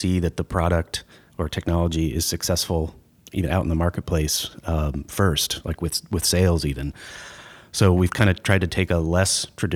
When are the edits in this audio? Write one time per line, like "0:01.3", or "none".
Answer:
none